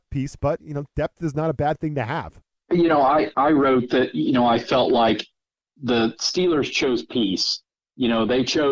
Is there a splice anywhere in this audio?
no; 0 cuts

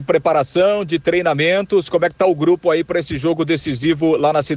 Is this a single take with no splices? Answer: yes; 0 cuts

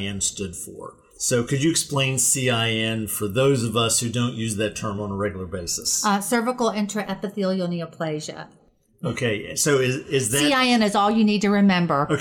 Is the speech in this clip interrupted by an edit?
no; 0 cuts

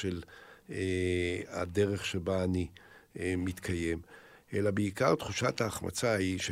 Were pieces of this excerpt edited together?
no; 0 cuts

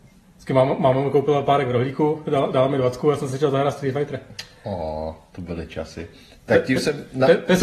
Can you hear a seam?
no; 0 cuts

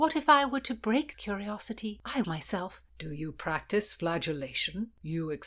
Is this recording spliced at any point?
yes; 3 cuts; at 1.1 s, 2.2 s, 2.9 s

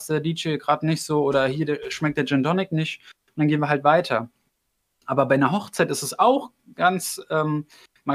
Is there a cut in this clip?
yes; 1 cut; at 6.7 s

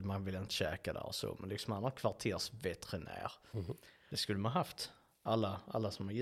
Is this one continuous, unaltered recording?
yes; 0 cuts

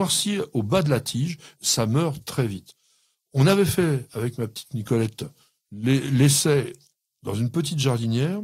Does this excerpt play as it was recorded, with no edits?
no; 1 cut; at 1.5 s

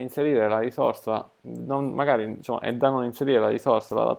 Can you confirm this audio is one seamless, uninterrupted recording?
yes; 0 cuts

